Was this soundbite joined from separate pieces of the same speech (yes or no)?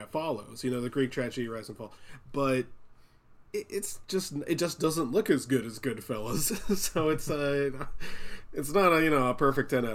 yes